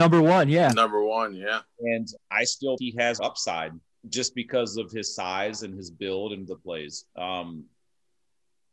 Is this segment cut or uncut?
cut